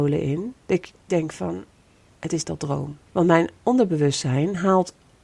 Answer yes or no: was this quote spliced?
yes